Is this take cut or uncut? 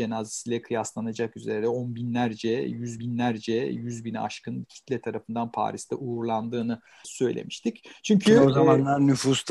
cut